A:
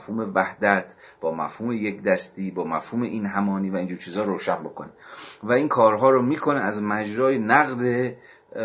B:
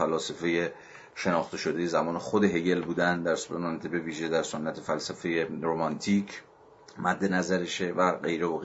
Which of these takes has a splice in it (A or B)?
B